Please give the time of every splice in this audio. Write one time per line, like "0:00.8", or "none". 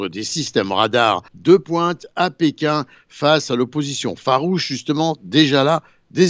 0:01.3